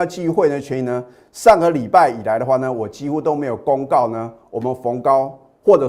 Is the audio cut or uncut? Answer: uncut